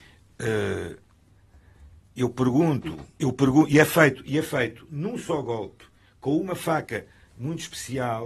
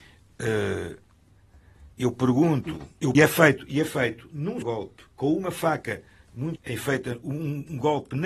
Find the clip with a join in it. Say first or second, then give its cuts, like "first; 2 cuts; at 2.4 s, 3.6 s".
second; 5 cuts; at 1.9 s, 3.1 s, 4.6 s, 5.1 s, 6.6 s